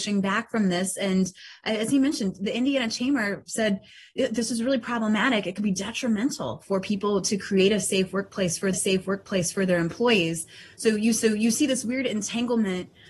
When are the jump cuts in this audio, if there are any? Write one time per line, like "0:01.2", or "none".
0:08.7
0:11.2